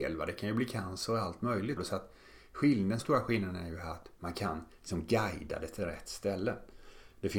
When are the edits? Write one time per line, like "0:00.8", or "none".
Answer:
0:01.8
0:03.0
0:04.7